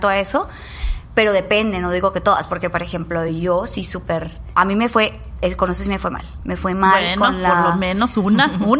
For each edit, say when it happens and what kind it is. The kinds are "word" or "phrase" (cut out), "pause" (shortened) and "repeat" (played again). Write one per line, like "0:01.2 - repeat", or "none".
none